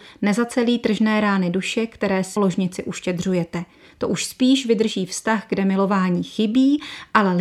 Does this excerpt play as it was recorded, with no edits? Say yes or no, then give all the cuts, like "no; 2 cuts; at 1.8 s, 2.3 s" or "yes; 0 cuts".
no; 1 cut; at 2.4 s